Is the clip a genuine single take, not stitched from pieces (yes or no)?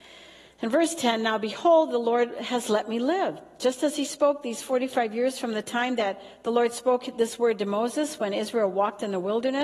yes